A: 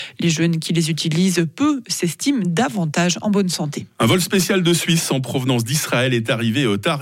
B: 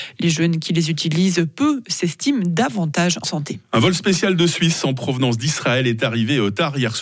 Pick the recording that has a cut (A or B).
B